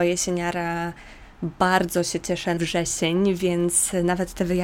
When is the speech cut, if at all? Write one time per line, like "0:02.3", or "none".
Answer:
0:02.6